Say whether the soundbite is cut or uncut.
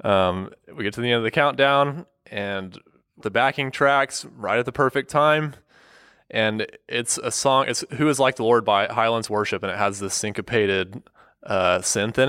cut